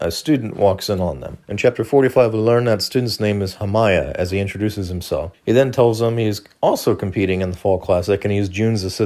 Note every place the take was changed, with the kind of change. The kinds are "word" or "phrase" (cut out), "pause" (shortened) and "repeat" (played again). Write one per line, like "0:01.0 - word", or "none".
0:01.4 - pause
0:05.3 - pause